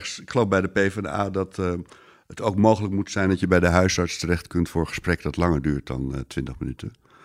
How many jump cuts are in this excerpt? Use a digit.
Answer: 0